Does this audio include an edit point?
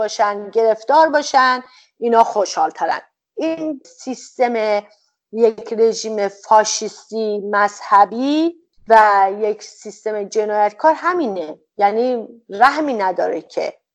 yes; 1 cut; at 3.8 s

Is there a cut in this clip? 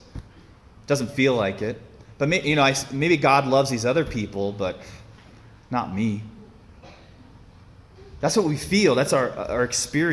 no; 0 cuts

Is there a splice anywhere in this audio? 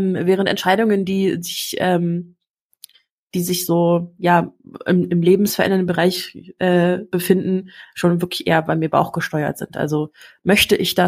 no; 0 cuts

